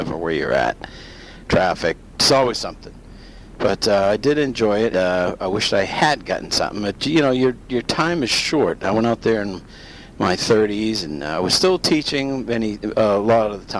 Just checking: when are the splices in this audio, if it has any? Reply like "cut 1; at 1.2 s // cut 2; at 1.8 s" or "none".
cut 1; at 4.9 s

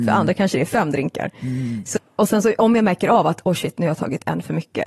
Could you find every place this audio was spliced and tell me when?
none

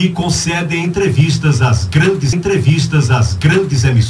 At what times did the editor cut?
cut 1; at 2.3 s

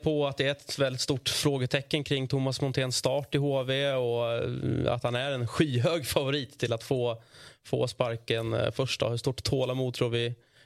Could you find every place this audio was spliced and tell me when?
none

